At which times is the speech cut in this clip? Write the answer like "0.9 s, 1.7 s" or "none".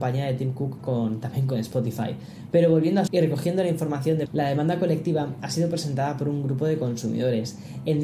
3.1 s, 4.3 s